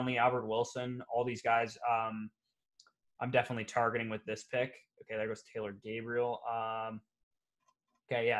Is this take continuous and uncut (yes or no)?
yes